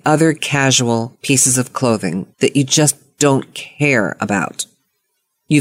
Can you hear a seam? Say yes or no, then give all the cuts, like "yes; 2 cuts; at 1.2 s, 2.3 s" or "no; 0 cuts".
yes; 1 cut; at 2.3 s